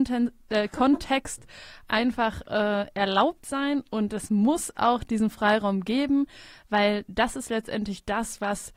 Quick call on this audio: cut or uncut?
uncut